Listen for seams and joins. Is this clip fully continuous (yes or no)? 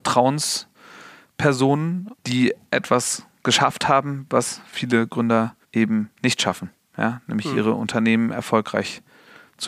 no